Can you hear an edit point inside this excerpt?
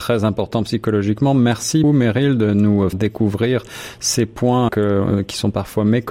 yes; 3 cuts; at 1.8 s, 2.9 s, 4.7 s

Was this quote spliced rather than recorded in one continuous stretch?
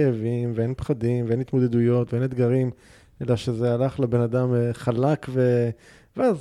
no; 0 cuts

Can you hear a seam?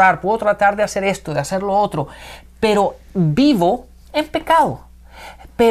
no; 0 cuts

